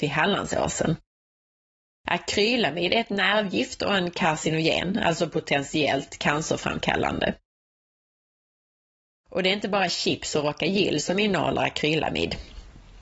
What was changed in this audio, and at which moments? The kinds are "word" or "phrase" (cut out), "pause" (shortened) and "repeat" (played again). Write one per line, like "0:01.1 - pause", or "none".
none